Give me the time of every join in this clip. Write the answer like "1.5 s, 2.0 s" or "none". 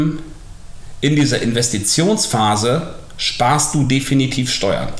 none